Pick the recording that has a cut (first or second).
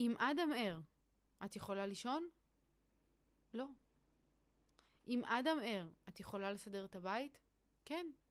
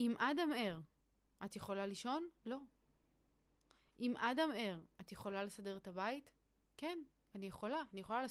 second